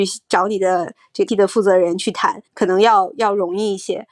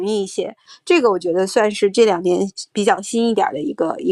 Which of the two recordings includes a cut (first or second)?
first